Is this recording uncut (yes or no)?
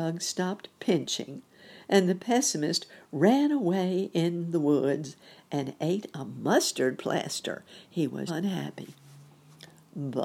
no